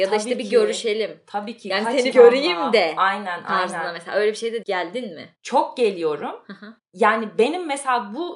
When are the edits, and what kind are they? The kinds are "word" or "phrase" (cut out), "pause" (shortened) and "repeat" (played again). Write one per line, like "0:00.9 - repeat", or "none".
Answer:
0:02.1 - word
0:04.6 - word
0:05.3 - pause
0:06.8 - pause